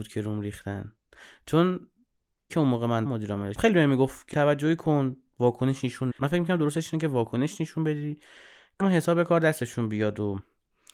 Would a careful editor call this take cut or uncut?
cut